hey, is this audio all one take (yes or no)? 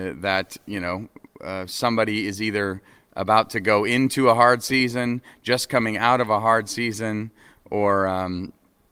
yes